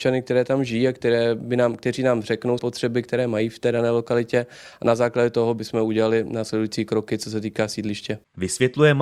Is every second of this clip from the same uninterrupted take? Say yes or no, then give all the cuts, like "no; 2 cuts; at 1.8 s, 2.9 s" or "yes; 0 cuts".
no; 1 cut; at 2.6 s